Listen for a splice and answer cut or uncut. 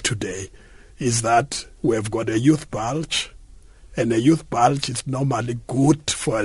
cut